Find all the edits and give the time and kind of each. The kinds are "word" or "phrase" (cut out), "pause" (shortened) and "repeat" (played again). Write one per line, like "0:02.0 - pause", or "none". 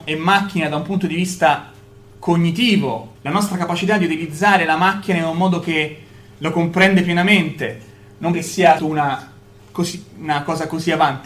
0:03.2 - word
0:08.3 - word
0:08.8 - word

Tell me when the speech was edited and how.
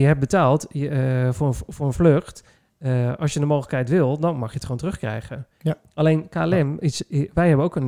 none

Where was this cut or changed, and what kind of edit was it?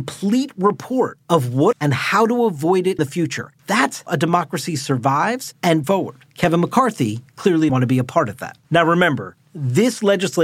0:01.7 - word
0:03.0 - word
0:04.1 - word
0:05.8 - phrase
0:06.3 - pause
0:07.7 - word
0:08.6 - pause

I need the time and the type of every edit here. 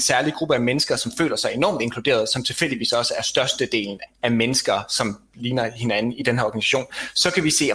0:04.1 - word

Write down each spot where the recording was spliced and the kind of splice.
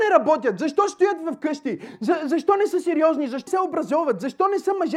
0:03.5 - word

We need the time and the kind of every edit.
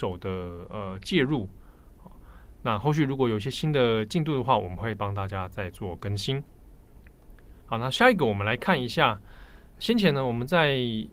0:07.6 - pause

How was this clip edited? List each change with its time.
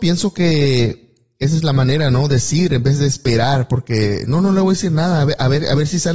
none

